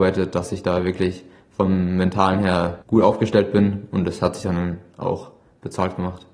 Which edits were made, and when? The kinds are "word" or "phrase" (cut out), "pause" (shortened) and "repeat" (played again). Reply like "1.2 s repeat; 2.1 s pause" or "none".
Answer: 2.8 s pause